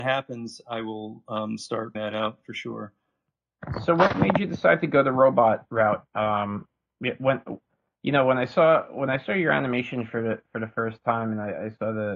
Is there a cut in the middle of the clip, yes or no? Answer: yes